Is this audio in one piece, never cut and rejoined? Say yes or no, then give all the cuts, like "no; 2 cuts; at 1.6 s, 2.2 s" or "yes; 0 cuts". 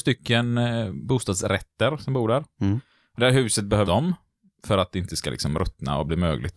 no; 1 cut; at 3.9 s